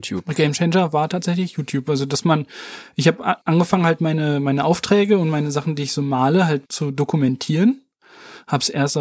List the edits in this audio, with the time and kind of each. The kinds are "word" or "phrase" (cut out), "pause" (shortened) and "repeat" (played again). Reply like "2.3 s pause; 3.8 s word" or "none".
3.4 s pause; 6.7 s pause

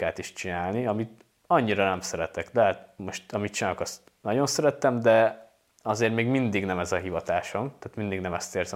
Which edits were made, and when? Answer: none

